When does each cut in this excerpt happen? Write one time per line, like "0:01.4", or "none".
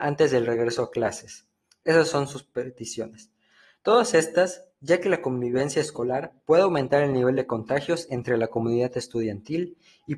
none